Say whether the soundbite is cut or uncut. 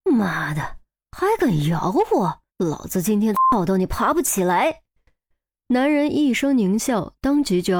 cut